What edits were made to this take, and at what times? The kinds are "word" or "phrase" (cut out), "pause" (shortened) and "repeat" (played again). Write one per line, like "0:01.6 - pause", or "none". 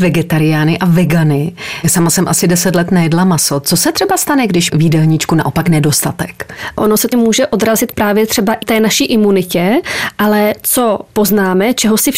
0:04.7 - phrase
0:07.1 - word
0:08.6 - word